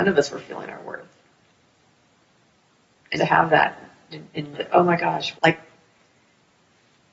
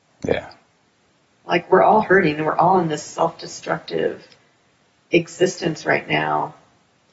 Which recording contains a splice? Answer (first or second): first